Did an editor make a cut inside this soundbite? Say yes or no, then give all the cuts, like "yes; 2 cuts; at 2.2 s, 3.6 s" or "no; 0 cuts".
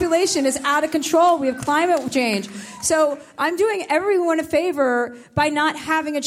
no; 0 cuts